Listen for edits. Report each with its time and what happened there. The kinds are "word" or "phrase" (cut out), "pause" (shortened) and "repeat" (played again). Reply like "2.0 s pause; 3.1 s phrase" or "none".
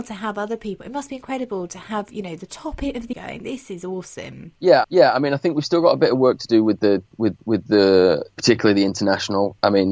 3.1 s word; 4.8 s repeat; 7.4 s repeat